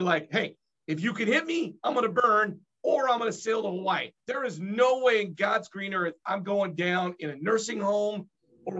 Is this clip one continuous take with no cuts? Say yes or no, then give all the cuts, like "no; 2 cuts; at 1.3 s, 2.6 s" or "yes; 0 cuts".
no; 1 cut; at 4.2 s